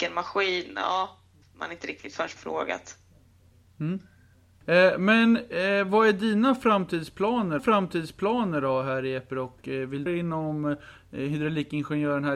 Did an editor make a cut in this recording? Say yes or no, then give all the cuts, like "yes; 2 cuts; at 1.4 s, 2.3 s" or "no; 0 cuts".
yes; 4 cuts; at 1.4 s, 2.4 s, 7.6 s, 10.1 s